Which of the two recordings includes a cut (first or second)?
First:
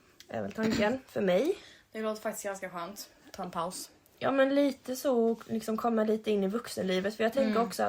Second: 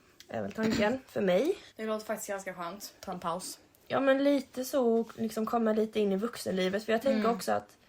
second